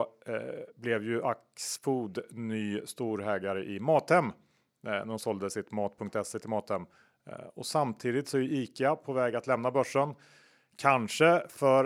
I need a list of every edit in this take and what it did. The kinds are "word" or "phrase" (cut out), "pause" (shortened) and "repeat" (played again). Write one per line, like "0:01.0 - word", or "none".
none